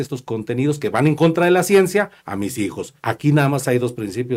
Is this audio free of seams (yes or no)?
no